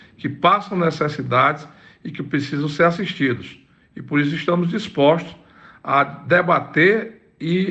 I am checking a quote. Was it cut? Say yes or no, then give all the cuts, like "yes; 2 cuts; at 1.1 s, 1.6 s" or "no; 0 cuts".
no; 0 cuts